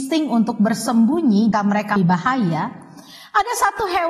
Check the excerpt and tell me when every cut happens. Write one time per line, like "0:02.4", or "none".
0:01.5
0:02.0